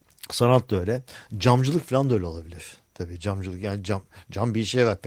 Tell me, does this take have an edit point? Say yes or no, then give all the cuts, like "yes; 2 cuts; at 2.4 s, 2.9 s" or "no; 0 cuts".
yes; 1 cut; at 2.8 s